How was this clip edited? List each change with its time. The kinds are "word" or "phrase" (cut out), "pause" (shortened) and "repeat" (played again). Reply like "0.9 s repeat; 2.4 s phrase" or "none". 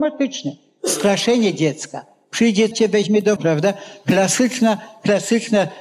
2.7 s word; 3.4 s word